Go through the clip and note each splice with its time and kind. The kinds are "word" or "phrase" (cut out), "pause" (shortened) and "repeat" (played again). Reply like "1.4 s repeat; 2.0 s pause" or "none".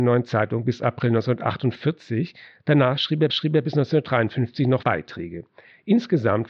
3.3 s repeat; 4.8 s word